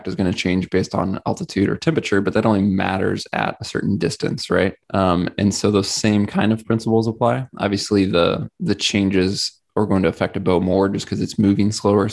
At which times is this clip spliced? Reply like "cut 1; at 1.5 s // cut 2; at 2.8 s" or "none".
cut 1; at 4.8 s // cut 2; at 9.7 s